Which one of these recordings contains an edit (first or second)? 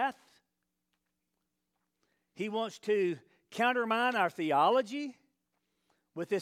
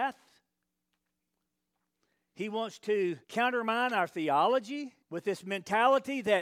second